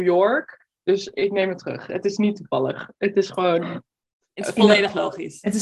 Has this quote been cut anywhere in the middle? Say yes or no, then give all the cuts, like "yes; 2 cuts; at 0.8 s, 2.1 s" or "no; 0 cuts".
no; 0 cuts